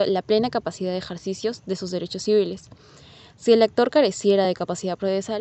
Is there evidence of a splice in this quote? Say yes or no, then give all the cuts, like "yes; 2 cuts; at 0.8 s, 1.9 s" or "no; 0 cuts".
no; 0 cuts